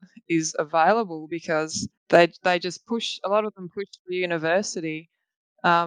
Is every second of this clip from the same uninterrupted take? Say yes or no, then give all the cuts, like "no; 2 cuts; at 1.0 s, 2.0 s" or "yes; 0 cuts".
no; 1 cut; at 2.0 s